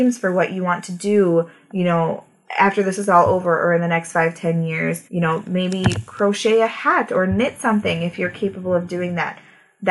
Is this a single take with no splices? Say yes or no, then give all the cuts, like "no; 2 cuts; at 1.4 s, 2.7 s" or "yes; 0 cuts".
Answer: no; 1 cut; at 5.1 s